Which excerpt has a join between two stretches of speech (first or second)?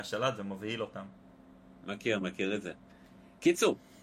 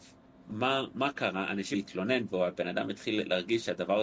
second